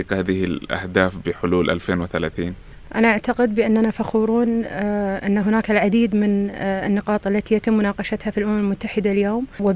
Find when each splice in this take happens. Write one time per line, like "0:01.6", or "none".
none